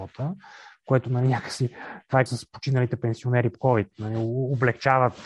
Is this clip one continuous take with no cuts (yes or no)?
no